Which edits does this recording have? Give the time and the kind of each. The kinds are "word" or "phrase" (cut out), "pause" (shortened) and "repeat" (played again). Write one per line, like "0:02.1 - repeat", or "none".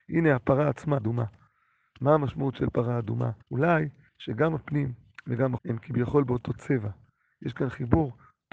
0:01.0 - phrase
0:03.4 - pause
0:05.6 - word